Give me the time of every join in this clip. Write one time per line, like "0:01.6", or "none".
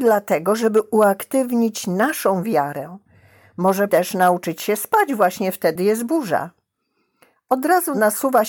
0:03.9
0:05.8